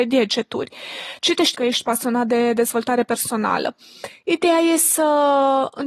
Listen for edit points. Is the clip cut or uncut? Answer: cut